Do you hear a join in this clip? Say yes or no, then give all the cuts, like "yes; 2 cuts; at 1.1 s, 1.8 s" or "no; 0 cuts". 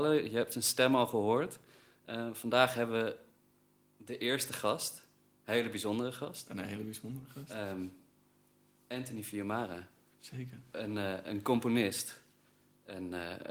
no; 0 cuts